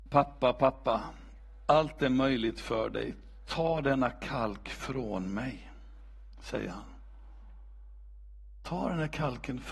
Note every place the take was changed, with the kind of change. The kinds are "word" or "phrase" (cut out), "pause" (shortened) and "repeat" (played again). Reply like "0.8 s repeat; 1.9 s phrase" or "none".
none